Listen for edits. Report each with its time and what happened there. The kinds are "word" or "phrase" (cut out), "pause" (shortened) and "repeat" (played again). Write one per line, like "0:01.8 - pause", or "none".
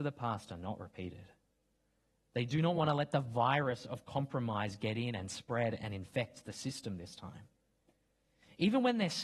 none